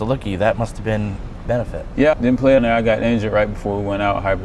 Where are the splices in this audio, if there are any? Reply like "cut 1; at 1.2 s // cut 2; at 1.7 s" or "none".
cut 1; at 1.4 s // cut 2; at 2.1 s // cut 3; at 2.6 s